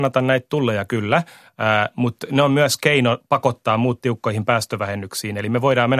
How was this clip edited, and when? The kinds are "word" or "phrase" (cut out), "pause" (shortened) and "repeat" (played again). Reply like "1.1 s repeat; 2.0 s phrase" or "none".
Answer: none